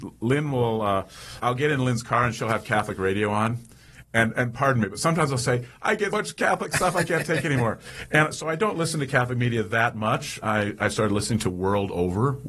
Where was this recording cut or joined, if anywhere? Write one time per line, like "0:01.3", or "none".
0:01.4
0:04.3
0:06.1
0:10.4